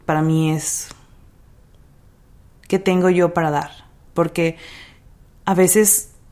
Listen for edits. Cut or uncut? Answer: uncut